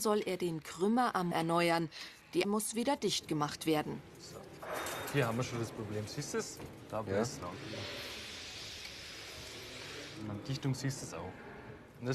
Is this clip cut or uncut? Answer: cut